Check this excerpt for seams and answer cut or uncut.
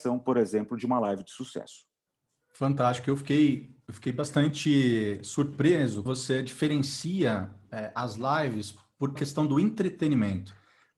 cut